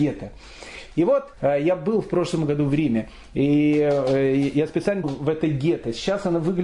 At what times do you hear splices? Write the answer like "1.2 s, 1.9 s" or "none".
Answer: 1.3 s, 5.0 s